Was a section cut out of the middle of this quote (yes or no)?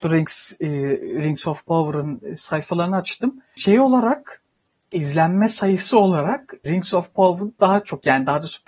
no